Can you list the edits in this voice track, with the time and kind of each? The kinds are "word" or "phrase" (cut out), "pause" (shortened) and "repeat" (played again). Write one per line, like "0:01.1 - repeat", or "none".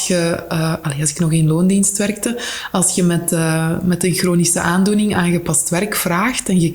none